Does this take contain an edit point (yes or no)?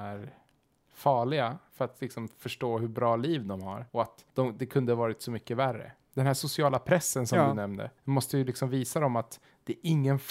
yes